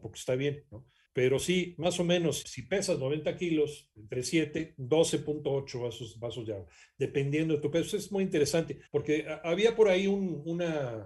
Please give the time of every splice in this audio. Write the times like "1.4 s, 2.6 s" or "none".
2.4 s, 8.9 s